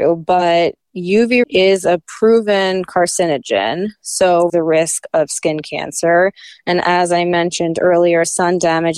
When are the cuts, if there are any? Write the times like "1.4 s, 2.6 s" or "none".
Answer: 1.4 s, 4.5 s